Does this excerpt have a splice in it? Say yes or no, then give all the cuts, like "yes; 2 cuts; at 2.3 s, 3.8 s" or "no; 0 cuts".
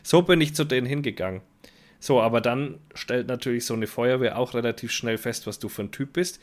no; 0 cuts